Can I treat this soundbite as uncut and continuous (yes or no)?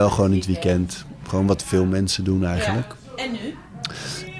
yes